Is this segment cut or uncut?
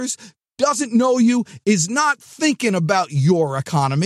uncut